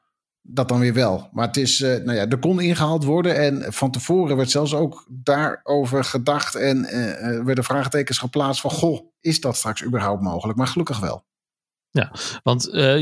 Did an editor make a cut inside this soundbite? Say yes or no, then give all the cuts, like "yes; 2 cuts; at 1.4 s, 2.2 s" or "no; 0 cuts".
no; 0 cuts